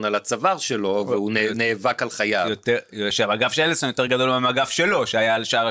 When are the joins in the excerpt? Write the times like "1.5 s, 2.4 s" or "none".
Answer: none